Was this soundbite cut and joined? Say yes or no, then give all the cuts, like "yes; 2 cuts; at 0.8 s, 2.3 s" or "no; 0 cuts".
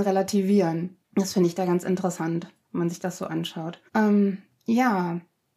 yes; 2 cuts; at 1.0 s, 3.9 s